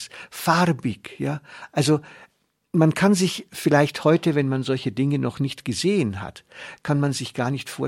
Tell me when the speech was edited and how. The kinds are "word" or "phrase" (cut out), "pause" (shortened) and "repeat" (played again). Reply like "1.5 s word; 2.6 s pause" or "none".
none